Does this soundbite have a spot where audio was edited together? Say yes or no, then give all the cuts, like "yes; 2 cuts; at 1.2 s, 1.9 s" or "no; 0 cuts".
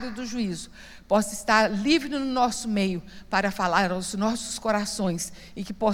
no; 0 cuts